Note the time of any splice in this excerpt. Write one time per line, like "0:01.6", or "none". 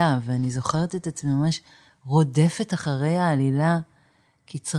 none